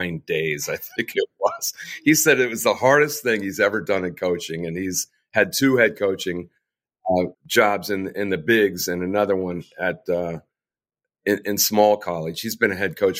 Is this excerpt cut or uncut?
cut